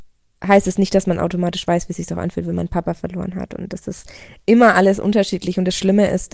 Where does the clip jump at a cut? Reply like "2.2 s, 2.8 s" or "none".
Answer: none